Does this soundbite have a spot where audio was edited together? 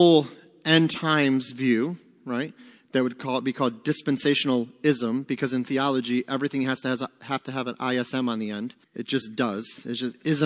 yes; 1 cut; at 8.8 s

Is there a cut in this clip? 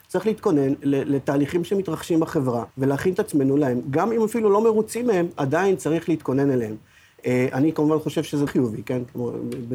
yes; 2 cuts; at 2.7 s, 8.5 s

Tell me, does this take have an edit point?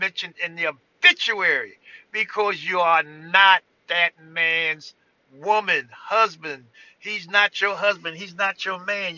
no; 0 cuts

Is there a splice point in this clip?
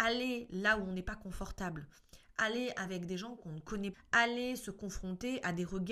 yes; 1 cut; at 3.9 s

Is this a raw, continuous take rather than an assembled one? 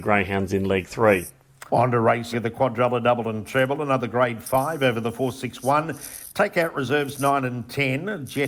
no; 2 cuts; at 1.7 s, 2.3 s

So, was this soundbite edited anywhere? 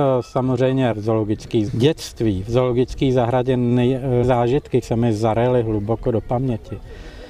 yes; 4 cuts; at 0.9 s, 1.7 s, 4.2 s, 4.8 s

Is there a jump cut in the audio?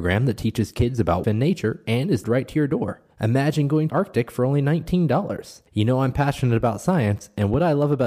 yes; 5 cuts; at 1.2 s, 2.2 s, 3.1 s, 3.9 s, 5.7 s

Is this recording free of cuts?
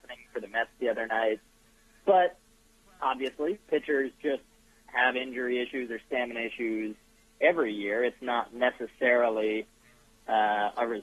yes; 0 cuts

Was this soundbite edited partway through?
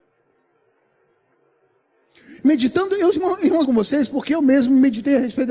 yes; 2 cuts; at 2.4 s, 3.6 s

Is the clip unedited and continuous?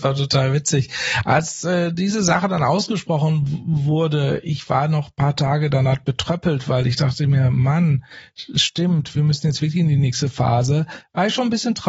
yes; 0 cuts

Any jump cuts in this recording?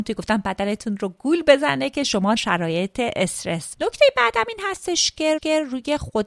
yes; 3 cuts; at 2.4 s, 3.7 s, 5.4 s

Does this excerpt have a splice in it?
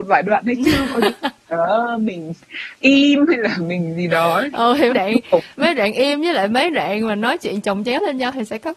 yes; 2 cuts; at 4.9 s, 5.5 s

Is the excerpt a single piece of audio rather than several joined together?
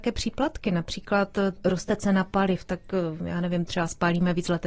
no; 1 cut; at 1.6 s

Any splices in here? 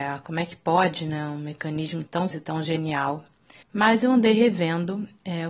yes; 2 cuts; at 2.3 s, 3.6 s

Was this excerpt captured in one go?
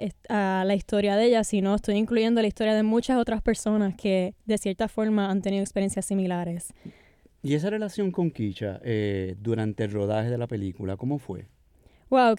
yes; 0 cuts

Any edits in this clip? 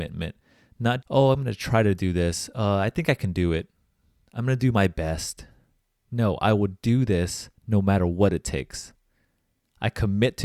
yes; 2 cuts; at 1.0 s, 7.6 s

